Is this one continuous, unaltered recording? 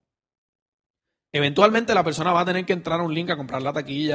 yes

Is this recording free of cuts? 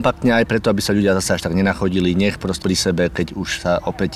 no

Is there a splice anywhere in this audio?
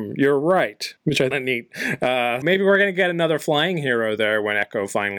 yes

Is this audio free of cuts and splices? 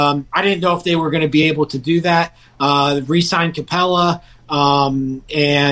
yes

